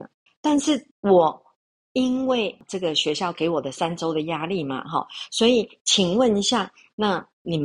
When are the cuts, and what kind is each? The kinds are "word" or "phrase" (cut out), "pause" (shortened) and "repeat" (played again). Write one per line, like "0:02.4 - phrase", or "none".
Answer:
0:00.9 - pause

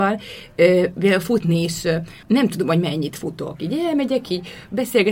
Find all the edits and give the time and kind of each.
0:02.2 - pause

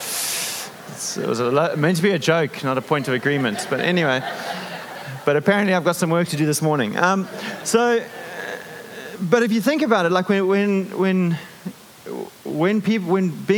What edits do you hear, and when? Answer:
none

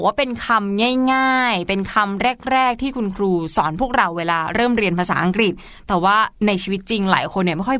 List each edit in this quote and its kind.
0:06.4 - pause

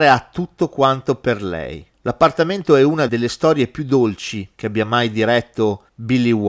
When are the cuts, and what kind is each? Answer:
0:03.1 - word

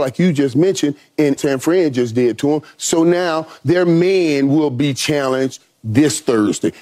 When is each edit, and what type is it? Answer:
0:01.4 - phrase

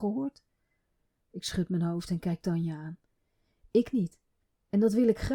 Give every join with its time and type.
none

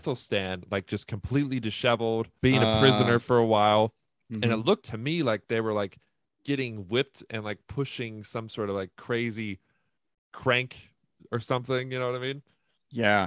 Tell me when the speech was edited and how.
0:02.4 - word
0:04.8 - word

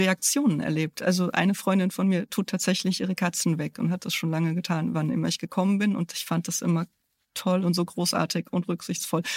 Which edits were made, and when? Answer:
none

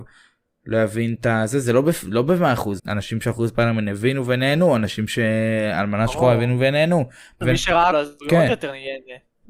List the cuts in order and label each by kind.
0:02.8 - word
0:07.4 - phrase
0:07.9 - word

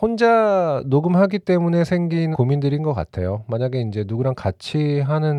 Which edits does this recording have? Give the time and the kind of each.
0:02.3 - word

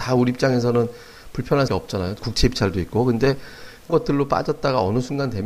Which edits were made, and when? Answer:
0:01.7 - word
0:02.2 - word
0:03.9 - word

